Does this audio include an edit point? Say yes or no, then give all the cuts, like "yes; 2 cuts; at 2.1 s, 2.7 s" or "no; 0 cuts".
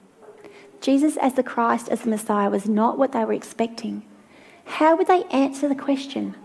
no; 0 cuts